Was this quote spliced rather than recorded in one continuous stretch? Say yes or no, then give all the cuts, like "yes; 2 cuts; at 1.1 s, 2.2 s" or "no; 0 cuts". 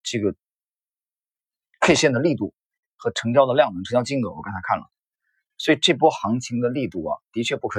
no; 0 cuts